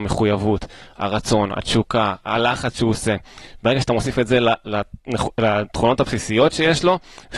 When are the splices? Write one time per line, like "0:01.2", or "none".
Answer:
none